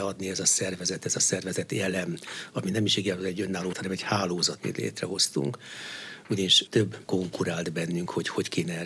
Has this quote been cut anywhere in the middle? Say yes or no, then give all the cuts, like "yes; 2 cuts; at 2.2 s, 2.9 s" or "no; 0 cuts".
yes; 4 cuts; at 3.7 s, 4.6 s, 6.7 s, 7.0 s